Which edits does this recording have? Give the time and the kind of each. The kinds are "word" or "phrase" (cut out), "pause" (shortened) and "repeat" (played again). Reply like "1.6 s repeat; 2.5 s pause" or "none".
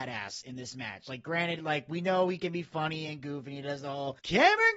none